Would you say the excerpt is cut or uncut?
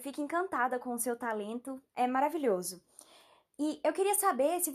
cut